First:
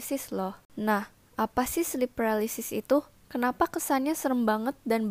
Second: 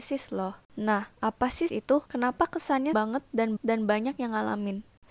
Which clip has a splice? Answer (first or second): second